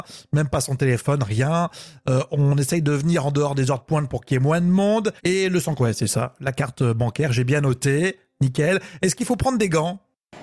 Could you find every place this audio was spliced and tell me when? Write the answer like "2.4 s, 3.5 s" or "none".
5.2 s, 5.8 s